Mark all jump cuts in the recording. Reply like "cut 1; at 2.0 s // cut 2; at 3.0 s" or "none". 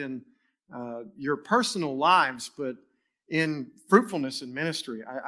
none